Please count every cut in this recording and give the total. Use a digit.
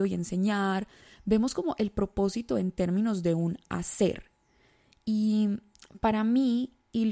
0